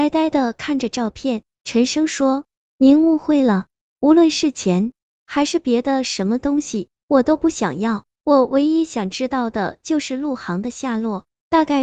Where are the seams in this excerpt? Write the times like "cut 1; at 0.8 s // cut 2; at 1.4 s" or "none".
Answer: none